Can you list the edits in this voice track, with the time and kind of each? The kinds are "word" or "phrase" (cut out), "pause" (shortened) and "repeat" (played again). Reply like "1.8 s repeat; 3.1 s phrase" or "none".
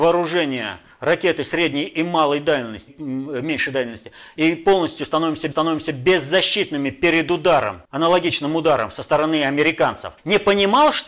2.9 s word; 5.5 s repeat; 7.8 s pause; 10.2 s pause